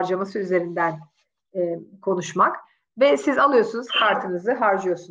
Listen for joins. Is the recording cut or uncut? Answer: uncut